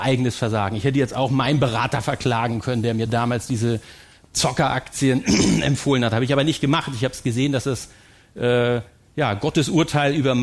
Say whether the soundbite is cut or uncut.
uncut